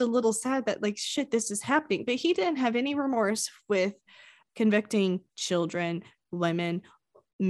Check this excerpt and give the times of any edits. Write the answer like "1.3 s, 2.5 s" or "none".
5.3 s